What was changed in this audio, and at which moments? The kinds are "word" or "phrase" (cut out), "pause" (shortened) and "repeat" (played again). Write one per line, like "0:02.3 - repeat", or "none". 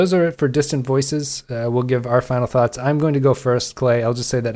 none